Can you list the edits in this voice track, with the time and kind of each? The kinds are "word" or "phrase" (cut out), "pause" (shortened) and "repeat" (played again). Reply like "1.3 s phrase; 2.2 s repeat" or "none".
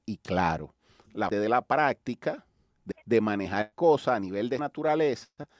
1.3 s word; 2.9 s phrase; 3.7 s word; 4.6 s word